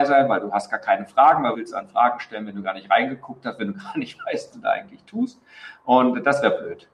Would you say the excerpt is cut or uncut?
cut